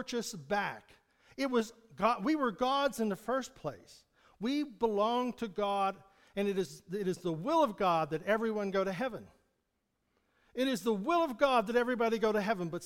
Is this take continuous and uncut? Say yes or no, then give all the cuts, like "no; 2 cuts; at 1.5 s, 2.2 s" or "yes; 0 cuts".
yes; 0 cuts